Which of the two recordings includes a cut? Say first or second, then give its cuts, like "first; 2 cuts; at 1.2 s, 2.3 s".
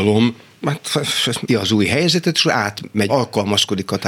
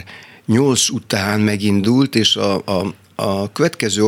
first; 2 cuts; at 1.5 s, 3.1 s